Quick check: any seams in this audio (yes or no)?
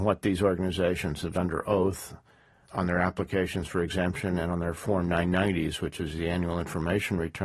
yes